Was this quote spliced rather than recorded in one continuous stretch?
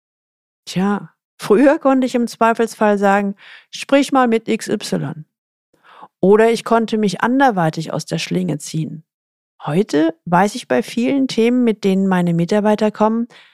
no; 0 cuts

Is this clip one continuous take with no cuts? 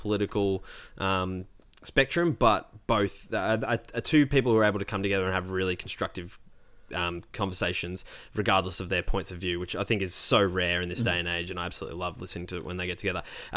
yes; 0 cuts

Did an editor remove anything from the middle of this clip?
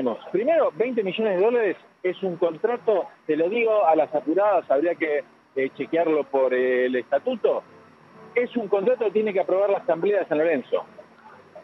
no; 0 cuts

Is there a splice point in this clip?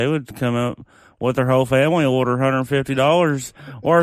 no; 0 cuts

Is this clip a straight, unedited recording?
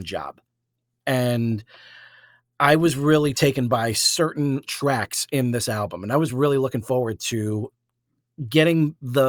yes; 0 cuts

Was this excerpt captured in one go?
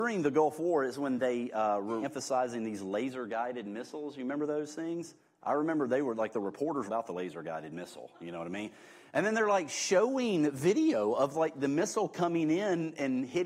no; 2 cuts; at 2.0 s, 6.9 s

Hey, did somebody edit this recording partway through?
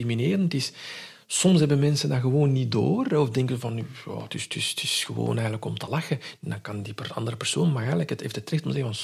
no; 0 cuts

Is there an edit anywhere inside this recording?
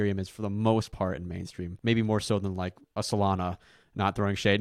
yes; 1 cut; at 1.8 s

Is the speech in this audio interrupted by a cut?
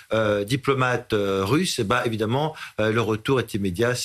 no; 0 cuts

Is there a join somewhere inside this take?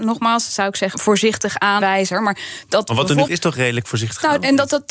yes; 3 cuts; at 0.9 s, 1.8 s, 3.3 s

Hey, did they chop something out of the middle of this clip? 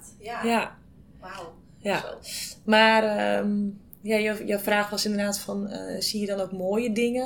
no; 0 cuts

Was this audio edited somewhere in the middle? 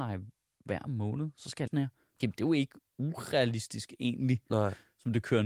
yes; 2 cuts; at 1.7 s, 2.2 s

